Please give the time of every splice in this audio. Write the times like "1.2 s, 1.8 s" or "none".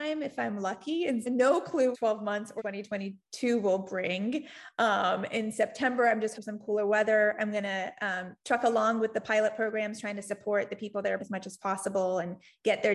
1.2 s, 1.9 s, 2.6 s, 6.3 s, 8.4 s, 11.2 s

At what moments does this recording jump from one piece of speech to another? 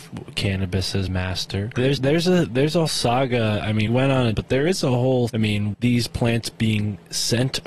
1.1 s, 2.0 s, 2.9 s, 3.9 s, 4.3 s, 5.3 s, 5.7 s

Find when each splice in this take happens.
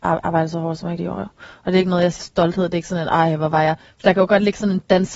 1.0 s, 2.2 s

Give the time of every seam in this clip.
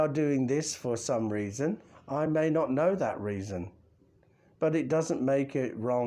none

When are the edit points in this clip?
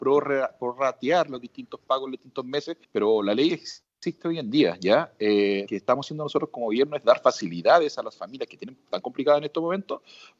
2.8 s, 5.7 s

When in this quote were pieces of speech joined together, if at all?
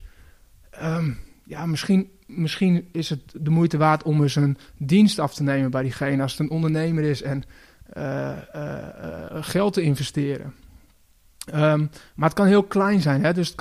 none

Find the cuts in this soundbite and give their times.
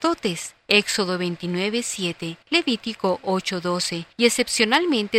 2.4 s, 4.1 s

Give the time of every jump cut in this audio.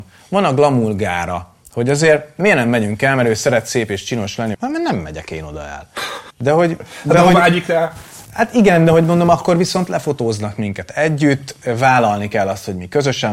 4.5 s, 6.3 s

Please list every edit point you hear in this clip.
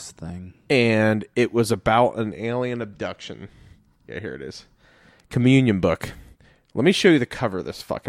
none

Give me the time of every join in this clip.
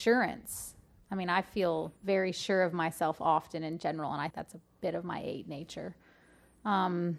2.0 s, 4.3 s

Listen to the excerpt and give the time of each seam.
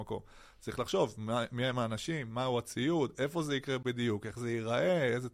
none

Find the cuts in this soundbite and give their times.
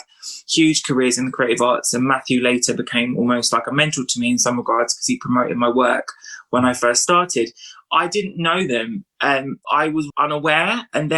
9.6 s, 10.1 s

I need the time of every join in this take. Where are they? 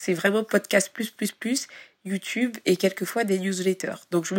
none

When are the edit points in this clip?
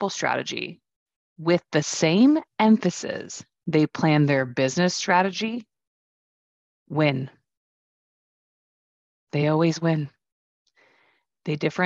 none

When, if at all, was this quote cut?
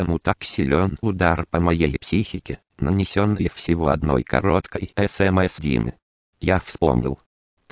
1.0 s, 5.6 s

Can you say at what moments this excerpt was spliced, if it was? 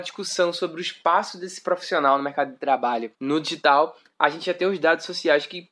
3.1 s

